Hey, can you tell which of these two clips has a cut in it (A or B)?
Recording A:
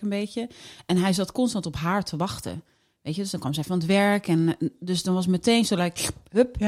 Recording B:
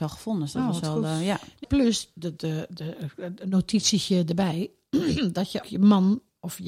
B